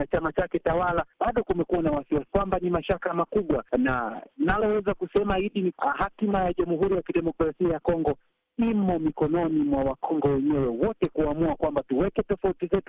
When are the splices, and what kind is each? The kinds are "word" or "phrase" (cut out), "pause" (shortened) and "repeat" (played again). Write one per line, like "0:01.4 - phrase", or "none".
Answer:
0:01.1 - pause
0:02.3 - phrase
0:05.7 - word

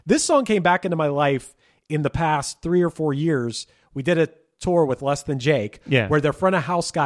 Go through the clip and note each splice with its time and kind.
none

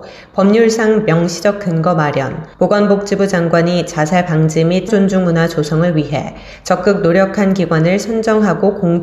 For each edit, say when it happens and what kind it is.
0:02.5 - pause
0:04.9 - word

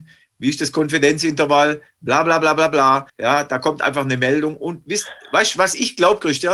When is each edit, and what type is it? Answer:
0:03.1 - pause

